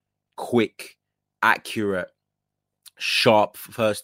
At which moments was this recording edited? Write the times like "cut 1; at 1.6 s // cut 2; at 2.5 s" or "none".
none

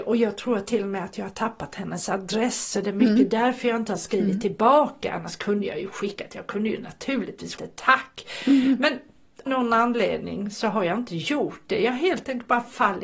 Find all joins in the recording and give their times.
cut 1; at 7.6 s // cut 2; at 9.5 s

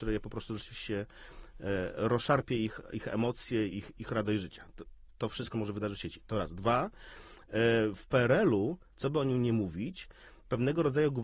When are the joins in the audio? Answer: cut 1; at 3.7 s // cut 2; at 5.5 s

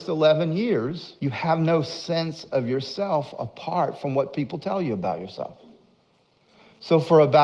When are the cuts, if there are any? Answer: cut 1; at 1.2 s

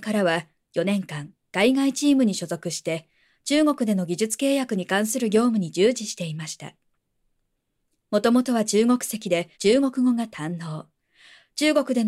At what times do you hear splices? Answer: cut 1; at 9.5 s

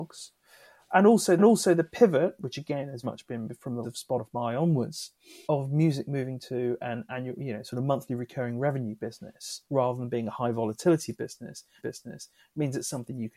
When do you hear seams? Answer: cut 1; at 1.4 s // cut 2; at 3.0 s // cut 3; at 3.8 s // cut 4; at 5.4 s // cut 5; at 9.7 s // cut 6; at 11.8 s

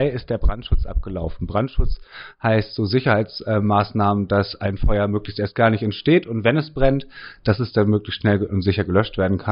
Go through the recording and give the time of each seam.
none

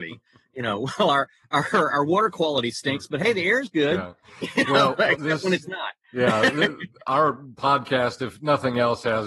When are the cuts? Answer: none

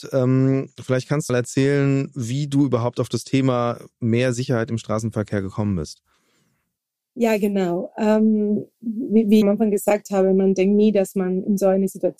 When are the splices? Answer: cut 1; at 1.3 s // cut 2; at 9.4 s

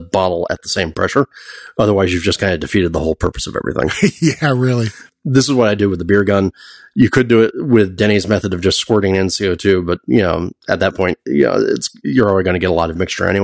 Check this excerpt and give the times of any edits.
none

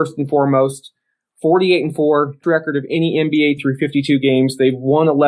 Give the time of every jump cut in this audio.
cut 1; at 2.4 s // cut 2; at 3.6 s

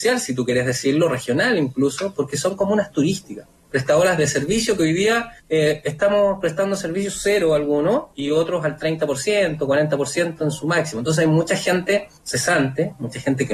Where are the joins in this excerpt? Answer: cut 1; at 5.4 s // cut 2; at 8.1 s // cut 3; at 12.2 s

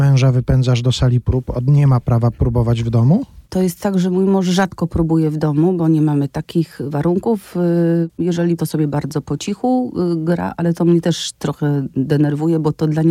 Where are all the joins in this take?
cut 1; at 3.5 s // cut 2; at 8.6 s

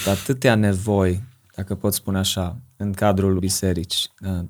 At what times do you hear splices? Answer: cut 1; at 3.4 s

